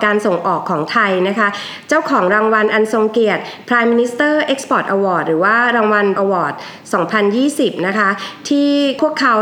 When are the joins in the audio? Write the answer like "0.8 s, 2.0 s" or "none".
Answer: 6.2 s